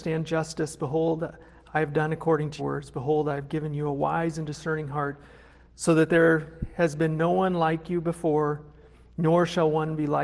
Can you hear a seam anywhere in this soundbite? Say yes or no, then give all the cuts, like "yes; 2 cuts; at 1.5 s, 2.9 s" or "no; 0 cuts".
yes; 1 cut; at 2.6 s